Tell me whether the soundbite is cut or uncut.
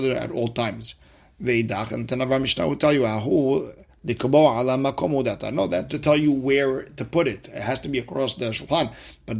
cut